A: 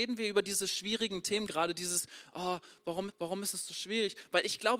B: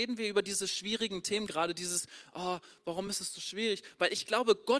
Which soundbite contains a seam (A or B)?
A